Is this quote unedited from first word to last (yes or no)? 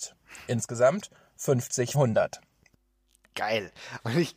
no